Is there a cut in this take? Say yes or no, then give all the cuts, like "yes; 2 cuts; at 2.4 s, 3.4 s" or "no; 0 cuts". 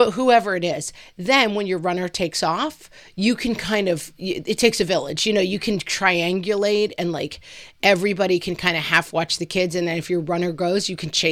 no; 0 cuts